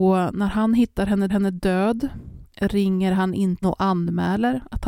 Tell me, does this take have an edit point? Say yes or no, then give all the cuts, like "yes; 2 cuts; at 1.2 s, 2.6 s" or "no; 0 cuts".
yes; 2 cuts; at 1.3 s, 3.6 s